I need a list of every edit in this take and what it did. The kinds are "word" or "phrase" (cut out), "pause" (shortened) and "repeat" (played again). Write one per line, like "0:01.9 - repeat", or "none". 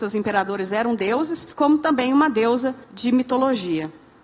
0:01.5 - pause
0:02.8 - pause